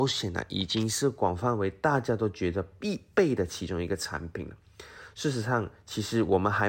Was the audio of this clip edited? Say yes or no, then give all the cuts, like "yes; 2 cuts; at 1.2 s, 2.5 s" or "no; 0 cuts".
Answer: no; 0 cuts